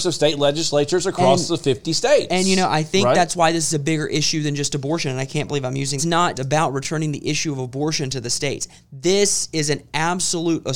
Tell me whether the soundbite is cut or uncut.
cut